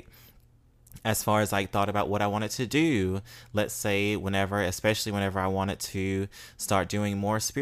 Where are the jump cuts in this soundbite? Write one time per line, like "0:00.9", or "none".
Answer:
none